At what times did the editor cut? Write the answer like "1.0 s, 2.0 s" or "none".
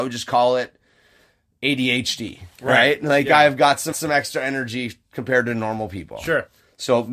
3.9 s